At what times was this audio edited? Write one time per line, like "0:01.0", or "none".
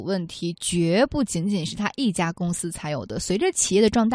none